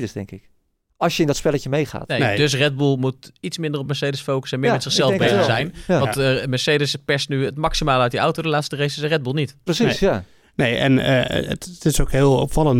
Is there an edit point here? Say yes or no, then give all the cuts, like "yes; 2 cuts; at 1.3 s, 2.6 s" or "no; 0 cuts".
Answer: no; 0 cuts